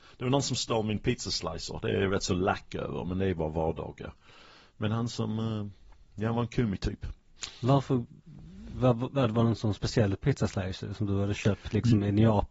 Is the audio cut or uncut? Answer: uncut